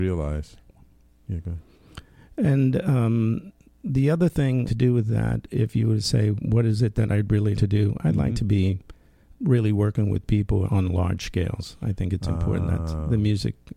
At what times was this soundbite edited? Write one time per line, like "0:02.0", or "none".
0:04.7
0:07.6
0:09.3
0:10.7